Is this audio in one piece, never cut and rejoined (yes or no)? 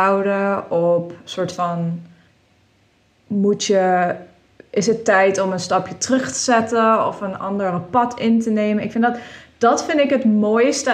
yes